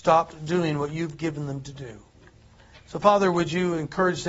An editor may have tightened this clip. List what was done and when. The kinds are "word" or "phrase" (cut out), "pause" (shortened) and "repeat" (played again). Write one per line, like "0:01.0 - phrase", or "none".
none